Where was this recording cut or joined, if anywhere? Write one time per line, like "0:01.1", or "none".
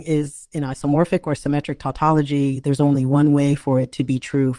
none